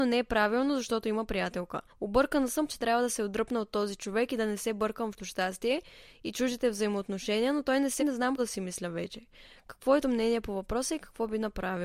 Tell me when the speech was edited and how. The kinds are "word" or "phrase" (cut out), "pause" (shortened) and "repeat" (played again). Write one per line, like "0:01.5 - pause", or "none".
0:01.9 - pause
0:02.7 - phrase
0:05.2 - word
0:08.0 - word
0:08.4 - word
0:10.0 - word